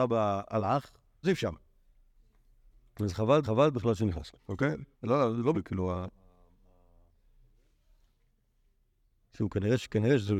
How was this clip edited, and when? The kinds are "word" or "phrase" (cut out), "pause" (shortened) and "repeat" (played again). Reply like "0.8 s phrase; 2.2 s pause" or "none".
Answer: 1.2 s word; 3.4 s repeat; 4.4 s pause; 4.9 s pause; 5.5 s word